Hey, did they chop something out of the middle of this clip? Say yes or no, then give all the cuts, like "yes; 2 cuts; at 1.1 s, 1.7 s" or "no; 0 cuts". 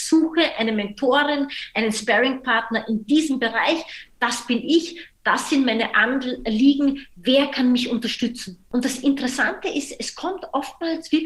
yes; 1 cut; at 8.6 s